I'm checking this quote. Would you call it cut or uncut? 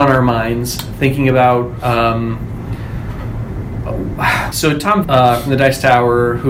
cut